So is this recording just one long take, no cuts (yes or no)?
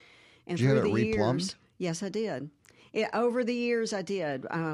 yes